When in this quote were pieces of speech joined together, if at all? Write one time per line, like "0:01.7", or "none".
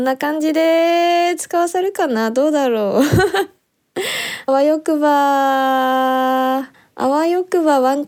0:04.5
0:06.7